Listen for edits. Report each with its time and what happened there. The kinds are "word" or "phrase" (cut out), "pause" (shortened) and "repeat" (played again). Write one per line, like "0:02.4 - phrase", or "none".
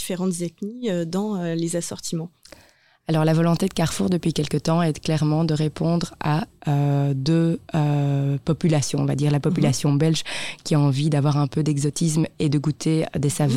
none